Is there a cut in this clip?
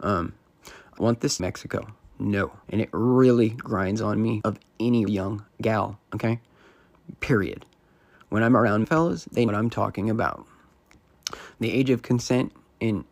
yes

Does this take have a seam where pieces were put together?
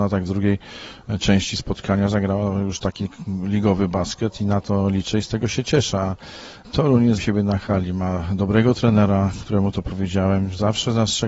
yes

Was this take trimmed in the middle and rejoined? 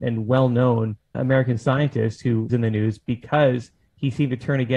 yes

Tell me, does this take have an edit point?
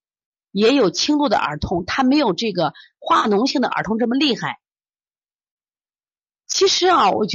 no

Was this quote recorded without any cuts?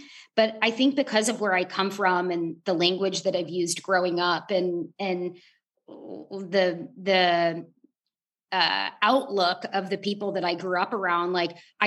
yes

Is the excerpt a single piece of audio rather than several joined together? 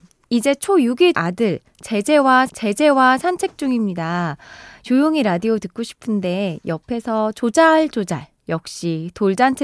no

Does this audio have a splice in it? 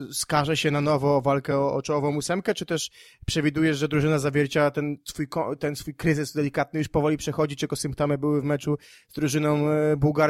no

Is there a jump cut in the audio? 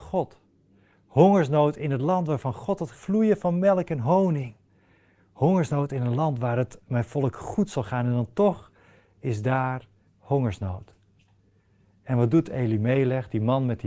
yes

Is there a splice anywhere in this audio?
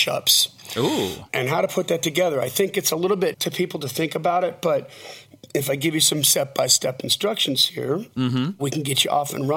yes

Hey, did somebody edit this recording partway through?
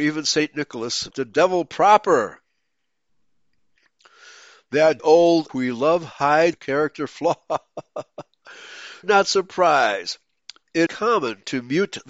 yes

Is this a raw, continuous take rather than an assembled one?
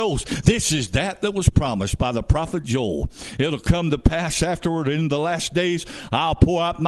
yes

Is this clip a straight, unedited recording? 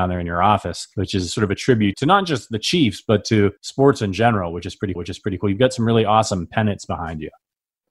no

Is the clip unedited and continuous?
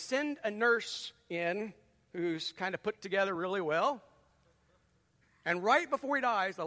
yes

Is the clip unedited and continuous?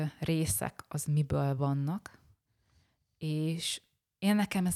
yes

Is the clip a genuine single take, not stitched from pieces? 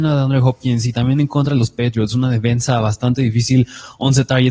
yes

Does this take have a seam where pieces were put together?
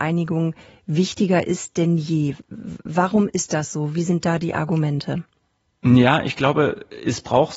no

